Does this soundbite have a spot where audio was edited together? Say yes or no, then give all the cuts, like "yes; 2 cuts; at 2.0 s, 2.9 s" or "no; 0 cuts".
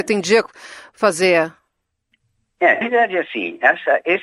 yes; 1 cut; at 2.8 s